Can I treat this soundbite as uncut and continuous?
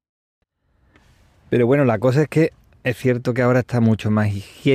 yes; 0 cuts

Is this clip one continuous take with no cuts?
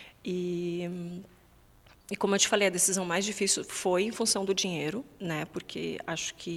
yes; 0 cuts

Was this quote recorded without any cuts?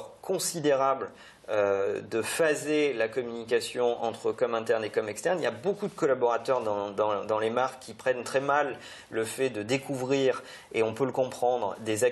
yes; 0 cuts

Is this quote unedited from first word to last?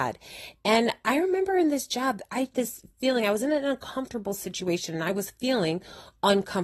no; 1 cut; at 2.5 s

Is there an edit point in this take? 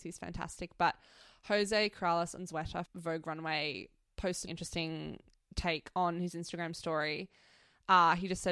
yes; 2 cuts; at 2.9 s, 4.5 s

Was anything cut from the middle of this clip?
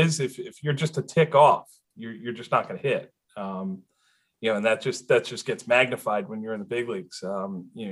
no; 0 cuts

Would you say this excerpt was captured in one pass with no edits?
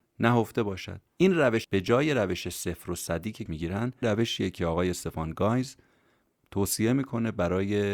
no; 4 cuts; at 1.1 s, 1.6 s, 3.5 s, 4.0 s

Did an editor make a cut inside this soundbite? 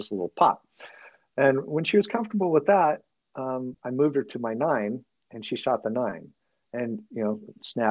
no; 0 cuts

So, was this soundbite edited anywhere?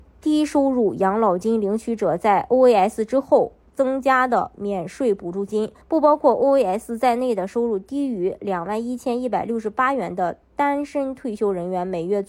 yes; 1 cut; at 5.8 s

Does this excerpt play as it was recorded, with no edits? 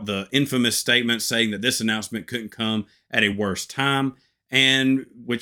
yes; 0 cuts

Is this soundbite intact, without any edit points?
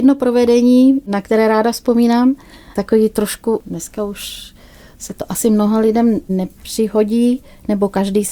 yes; 0 cuts

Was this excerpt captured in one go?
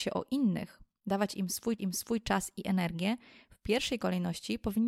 no; 1 cut; at 1.8 s

